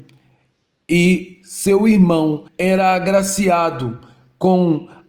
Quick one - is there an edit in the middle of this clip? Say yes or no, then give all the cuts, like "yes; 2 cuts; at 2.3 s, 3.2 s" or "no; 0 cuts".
yes; 1 cut; at 2.5 s